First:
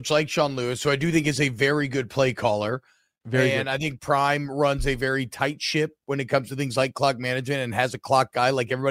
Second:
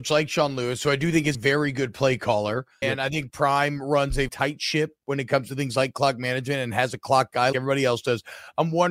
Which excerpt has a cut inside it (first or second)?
second